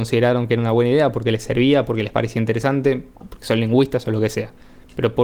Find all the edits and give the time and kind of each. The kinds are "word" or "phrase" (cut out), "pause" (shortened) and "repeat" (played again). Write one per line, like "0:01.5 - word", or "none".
none